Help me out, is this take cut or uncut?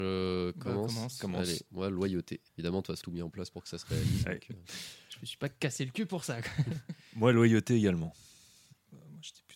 cut